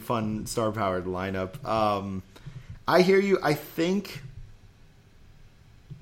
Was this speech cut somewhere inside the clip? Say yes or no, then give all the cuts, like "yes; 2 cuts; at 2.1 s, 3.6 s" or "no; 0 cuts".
no; 0 cuts